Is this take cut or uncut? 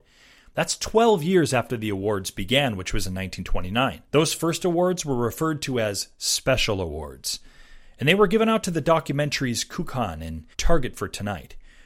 cut